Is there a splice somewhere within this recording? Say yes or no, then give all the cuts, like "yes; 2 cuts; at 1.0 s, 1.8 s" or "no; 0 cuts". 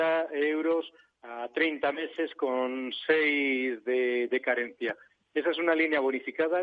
no; 0 cuts